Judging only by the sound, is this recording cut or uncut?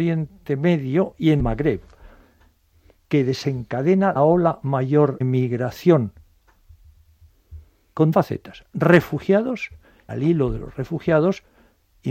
cut